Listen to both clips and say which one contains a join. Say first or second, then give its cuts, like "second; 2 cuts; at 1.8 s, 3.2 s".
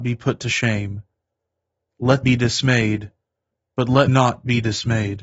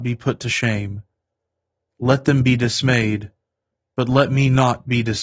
first; 2 cuts; at 2.2 s, 4.1 s